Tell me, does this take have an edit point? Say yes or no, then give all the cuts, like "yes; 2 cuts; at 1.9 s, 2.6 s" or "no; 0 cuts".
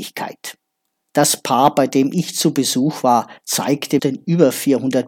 yes; 1 cut; at 4.0 s